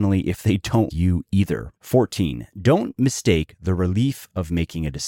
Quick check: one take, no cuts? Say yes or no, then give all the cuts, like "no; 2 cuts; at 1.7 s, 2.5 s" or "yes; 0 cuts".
no; 2 cuts; at 0.9 s, 1.8 s